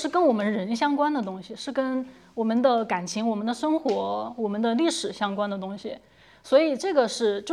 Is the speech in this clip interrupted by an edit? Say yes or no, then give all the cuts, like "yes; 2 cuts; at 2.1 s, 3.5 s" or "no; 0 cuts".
no; 0 cuts